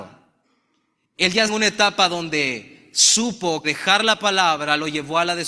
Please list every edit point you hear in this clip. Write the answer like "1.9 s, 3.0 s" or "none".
1.5 s, 3.6 s